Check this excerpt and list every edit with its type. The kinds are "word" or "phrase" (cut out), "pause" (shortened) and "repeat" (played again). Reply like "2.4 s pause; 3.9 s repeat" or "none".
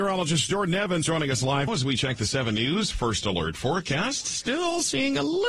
1.0 s word; 1.7 s word